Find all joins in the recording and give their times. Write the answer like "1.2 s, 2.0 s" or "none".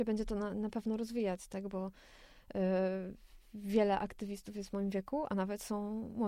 none